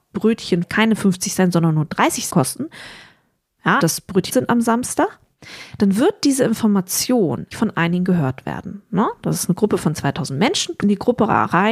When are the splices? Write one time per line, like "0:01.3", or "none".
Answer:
0:02.3
0:03.8
0:04.3
0:07.5
0:10.8